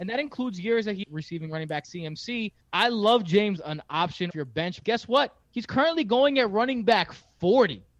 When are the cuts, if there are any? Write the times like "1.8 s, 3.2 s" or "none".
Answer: 1.0 s, 1.8 s, 2.6 s, 3.6 s, 4.3 s, 4.8 s, 5.4 s